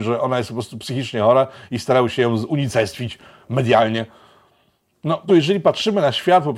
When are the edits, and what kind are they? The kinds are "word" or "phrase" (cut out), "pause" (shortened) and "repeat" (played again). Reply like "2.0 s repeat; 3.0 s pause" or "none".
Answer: 5.3 s word